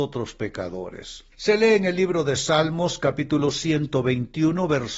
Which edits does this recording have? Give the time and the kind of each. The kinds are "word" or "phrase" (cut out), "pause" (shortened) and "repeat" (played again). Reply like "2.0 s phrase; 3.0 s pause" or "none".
1.3 s pause